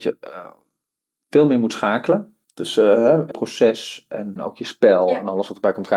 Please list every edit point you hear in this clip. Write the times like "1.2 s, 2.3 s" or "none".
2.4 s, 3.3 s, 4.4 s